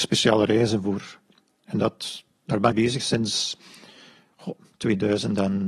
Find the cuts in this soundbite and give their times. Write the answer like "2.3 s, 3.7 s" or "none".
2.7 s